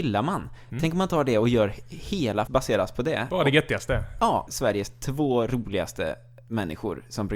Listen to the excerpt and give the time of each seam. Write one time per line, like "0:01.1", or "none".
0:02.5
0:04.5